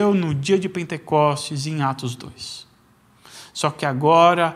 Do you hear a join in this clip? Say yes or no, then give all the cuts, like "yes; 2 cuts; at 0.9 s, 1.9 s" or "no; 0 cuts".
no; 0 cuts